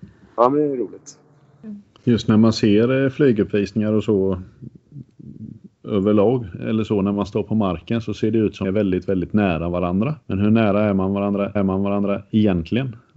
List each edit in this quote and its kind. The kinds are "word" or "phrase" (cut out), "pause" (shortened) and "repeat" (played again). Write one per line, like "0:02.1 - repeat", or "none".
0:02.0 - pause
0:08.6 - word
0:10.2 - pause
0:11.6 - repeat